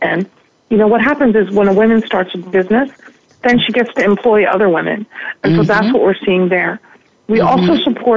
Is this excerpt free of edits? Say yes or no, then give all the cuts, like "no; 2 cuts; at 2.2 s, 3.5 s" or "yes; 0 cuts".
yes; 0 cuts